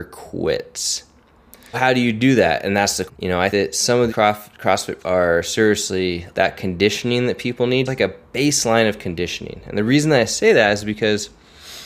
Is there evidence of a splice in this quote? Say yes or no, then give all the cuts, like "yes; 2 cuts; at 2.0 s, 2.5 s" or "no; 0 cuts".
yes; 7 cuts; at 1.7 s, 3.1 s, 3.5 s, 4.1 s, 5.0 s, 6.3 s, 7.9 s